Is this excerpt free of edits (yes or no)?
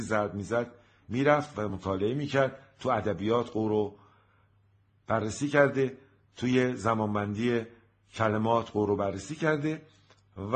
yes